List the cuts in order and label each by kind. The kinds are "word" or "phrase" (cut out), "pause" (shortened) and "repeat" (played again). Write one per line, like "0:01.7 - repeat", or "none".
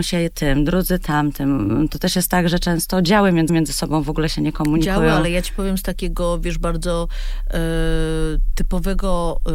0:03.5 - repeat